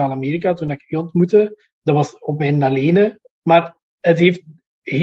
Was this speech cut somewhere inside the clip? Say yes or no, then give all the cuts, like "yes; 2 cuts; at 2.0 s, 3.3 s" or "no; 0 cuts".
yes; 1 cut; at 3.3 s